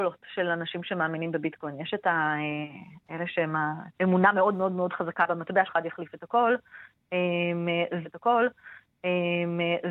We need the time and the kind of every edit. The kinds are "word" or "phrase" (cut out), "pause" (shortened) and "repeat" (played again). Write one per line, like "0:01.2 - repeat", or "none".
0:03.9 - pause
0:05.7 - phrase
0:08.0 - repeat